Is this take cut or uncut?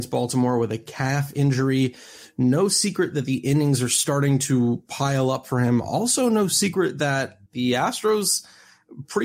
cut